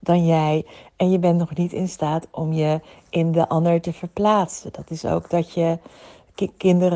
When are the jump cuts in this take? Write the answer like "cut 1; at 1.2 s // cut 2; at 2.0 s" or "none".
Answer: none